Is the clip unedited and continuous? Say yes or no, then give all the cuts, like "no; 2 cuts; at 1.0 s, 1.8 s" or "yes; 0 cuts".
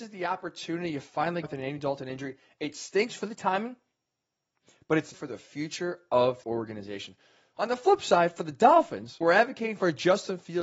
no; 4 cuts; at 1.4 s, 5.1 s, 6.4 s, 9.2 s